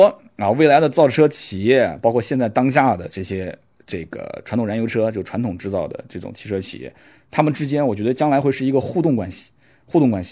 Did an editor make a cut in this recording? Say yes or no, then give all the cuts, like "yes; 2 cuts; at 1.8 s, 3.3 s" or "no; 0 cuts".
no; 0 cuts